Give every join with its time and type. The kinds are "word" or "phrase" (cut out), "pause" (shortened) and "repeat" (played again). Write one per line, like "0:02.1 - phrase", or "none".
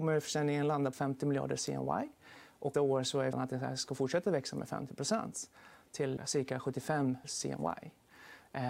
0:00.9 - word
0:02.7 - word
0:03.3 - word
0:06.2 - word
0:07.2 - word